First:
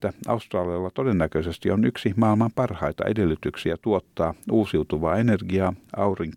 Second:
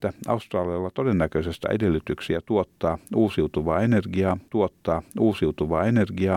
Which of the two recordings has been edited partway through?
second; 2 cuts; at 1.6 s, 4.5 s

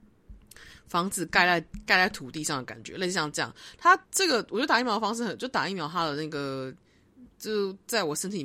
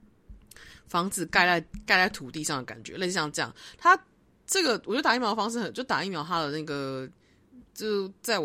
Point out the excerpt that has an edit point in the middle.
first; 1 cut; at 4.0 s

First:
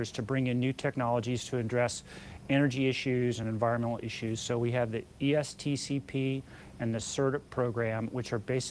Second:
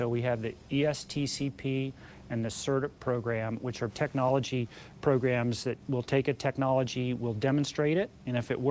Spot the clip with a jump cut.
second; 2 cuts; at 3.9 s, 5.8 s

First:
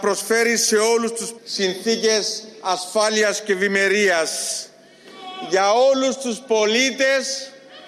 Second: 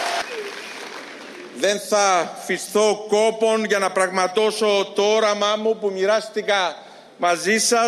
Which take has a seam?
first; 1 cut; at 1.4 s

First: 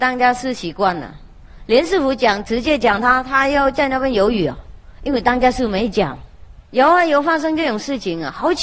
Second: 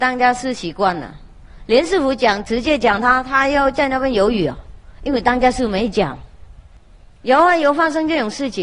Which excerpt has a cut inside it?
first; 1 cut; at 6.6 s

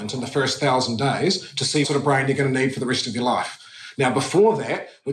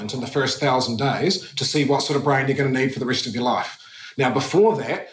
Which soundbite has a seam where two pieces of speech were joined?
first; 1 cut; at 1.8 s

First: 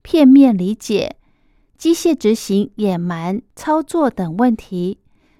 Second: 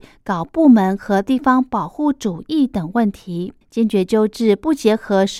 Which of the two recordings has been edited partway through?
second; 1 cut; at 3.6 s

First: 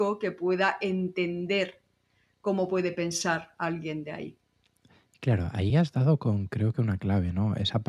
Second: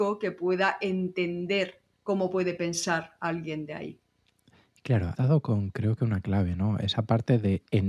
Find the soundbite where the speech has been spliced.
second; 2 cuts; at 1.9 s, 5.1 s

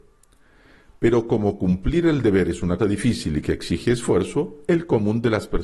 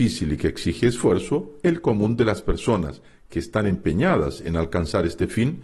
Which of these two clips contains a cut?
first; 1 cut; at 2.8 s

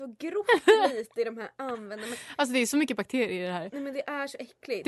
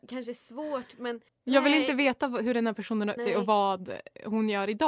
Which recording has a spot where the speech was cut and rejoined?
second; 2 cuts; at 1.3 s, 3.2 s

